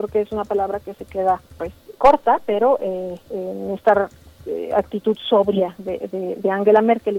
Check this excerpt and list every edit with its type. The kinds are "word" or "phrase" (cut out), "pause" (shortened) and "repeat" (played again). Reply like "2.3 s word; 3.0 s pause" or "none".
2.0 s word